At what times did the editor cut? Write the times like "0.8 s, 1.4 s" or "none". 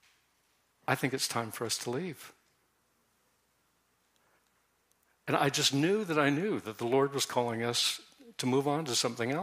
none